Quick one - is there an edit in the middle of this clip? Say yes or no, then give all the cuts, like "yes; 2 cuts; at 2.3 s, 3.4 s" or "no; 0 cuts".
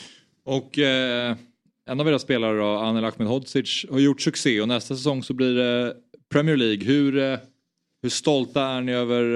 no; 0 cuts